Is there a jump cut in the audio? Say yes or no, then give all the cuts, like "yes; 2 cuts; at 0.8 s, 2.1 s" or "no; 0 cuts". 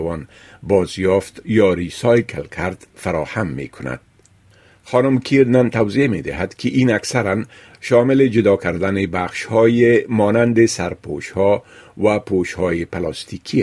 no; 0 cuts